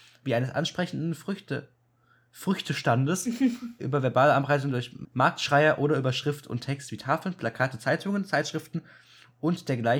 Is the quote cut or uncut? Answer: cut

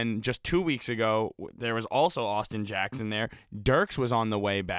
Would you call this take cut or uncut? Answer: uncut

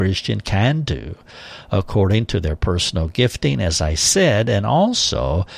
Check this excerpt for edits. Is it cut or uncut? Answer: uncut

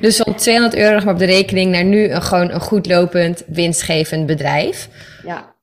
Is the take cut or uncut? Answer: uncut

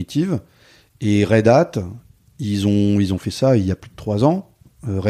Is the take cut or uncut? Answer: uncut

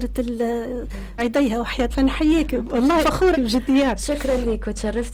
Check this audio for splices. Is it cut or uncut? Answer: cut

